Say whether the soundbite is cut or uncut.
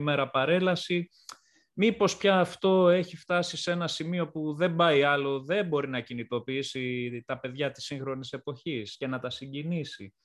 uncut